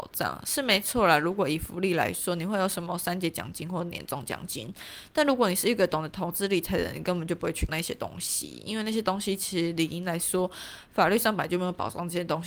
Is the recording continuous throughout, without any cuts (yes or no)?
no